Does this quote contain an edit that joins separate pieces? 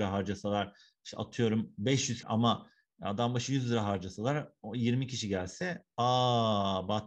yes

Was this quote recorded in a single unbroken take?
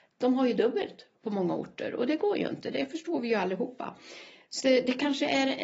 no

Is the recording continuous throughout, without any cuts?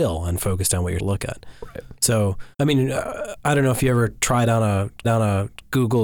no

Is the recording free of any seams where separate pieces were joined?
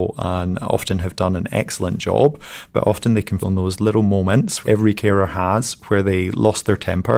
no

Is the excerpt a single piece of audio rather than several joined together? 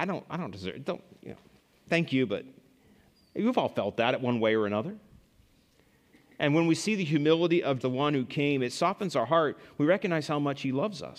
no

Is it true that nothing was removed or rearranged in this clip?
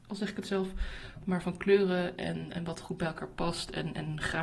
yes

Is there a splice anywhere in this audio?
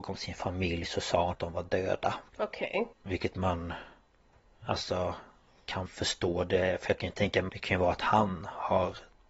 yes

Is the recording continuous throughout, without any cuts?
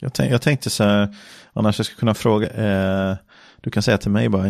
no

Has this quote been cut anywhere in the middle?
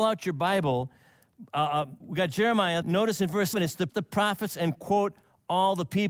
yes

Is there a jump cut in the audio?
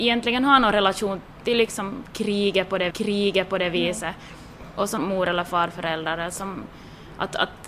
yes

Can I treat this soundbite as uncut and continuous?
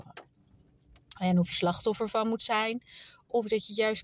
no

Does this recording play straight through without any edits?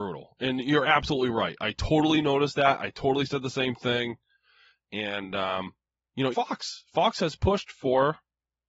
no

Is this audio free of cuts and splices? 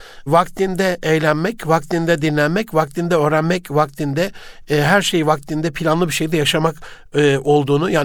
yes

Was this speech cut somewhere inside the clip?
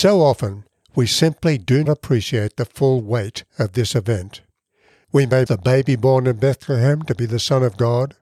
yes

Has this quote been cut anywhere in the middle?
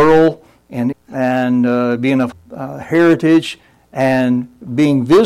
yes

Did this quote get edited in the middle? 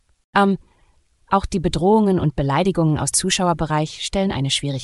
yes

